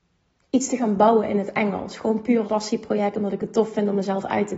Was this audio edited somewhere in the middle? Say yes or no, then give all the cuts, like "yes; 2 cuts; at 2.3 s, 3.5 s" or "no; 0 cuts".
yes; 1 cut; at 2.4 s